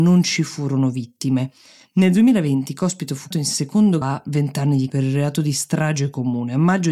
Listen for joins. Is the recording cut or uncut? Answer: cut